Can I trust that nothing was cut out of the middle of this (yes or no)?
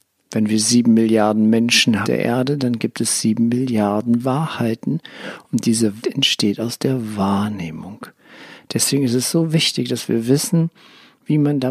no